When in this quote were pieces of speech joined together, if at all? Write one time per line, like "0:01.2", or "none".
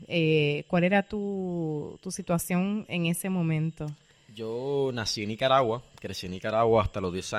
none